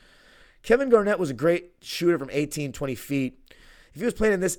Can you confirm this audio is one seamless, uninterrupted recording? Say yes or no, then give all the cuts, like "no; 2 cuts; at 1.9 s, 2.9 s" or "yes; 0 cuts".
yes; 0 cuts